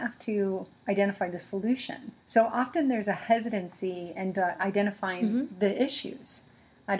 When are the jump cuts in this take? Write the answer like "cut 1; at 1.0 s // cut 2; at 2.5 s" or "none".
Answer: cut 1; at 2.2 s